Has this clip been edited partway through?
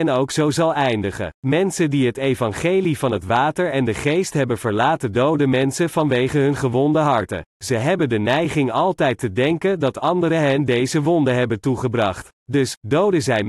yes; 3 cuts; at 1.4 s, 7.5 s, 12.3 s

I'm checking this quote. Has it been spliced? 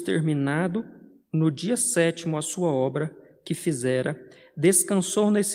no; 0 cuts

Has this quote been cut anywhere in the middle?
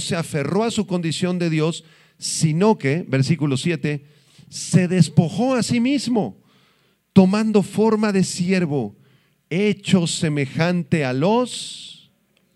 no; 0 cuts

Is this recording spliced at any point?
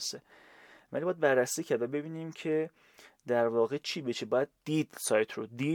no; 0 cuts

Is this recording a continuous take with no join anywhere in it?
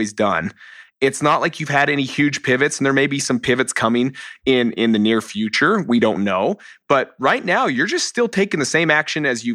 yes; 0 cuts

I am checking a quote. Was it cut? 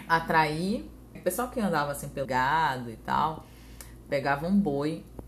yes; 2 cuts; at 1.1 s, 2.2 s

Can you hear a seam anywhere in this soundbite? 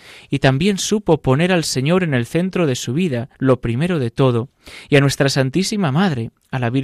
yes; 1 cut; at 3.3 s

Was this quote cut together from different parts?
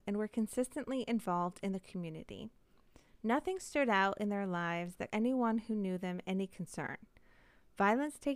yes; 1 cut; at 5.1 s

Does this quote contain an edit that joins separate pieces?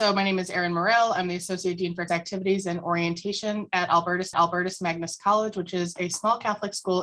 yes; 2 cuts; at 2.1 s, 4.3 s

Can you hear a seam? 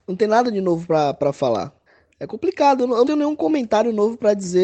yes; 2 cuts; at 1.9 s, 3.0 s

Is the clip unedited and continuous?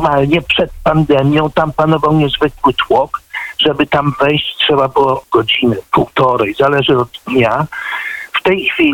no; 1 cut; at 5.2 s

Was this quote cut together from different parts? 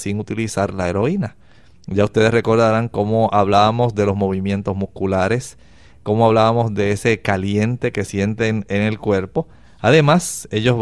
no; 0 cuts

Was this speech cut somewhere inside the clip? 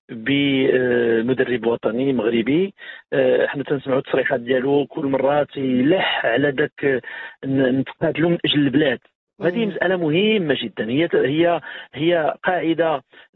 no; 0 cuts

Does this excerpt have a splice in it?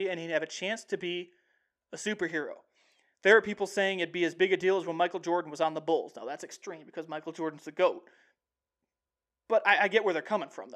no; 0 cuts

